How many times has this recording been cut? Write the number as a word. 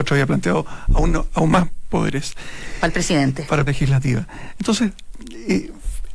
one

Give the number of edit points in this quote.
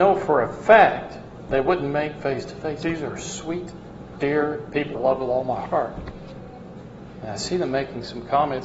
one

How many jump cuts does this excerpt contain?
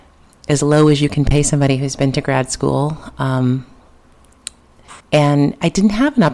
one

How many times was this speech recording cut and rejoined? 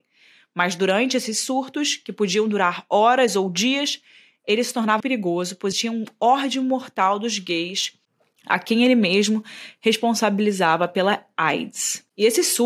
two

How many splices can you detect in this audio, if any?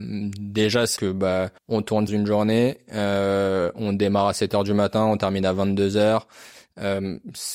three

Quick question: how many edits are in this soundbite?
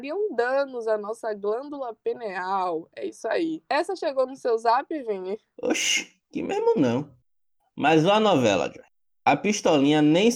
zero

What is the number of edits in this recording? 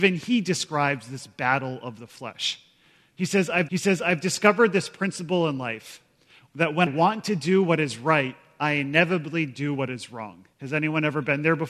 three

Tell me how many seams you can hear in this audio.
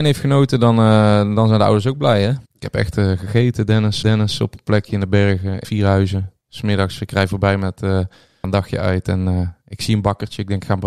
four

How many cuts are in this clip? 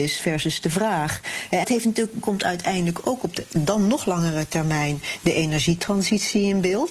two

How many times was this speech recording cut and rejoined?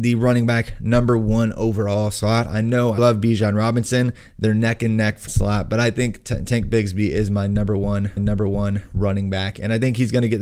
three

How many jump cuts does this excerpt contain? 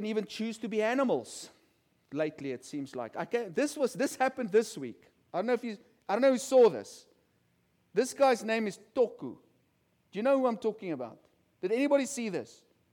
zero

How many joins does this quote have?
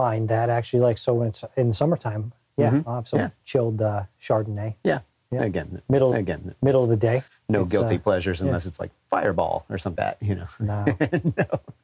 three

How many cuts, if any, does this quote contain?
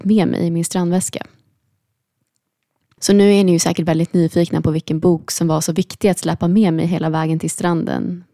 zero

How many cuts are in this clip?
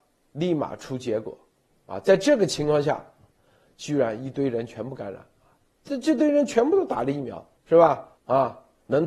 two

